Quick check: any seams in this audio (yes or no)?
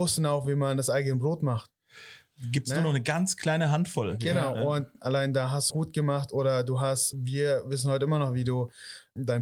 yes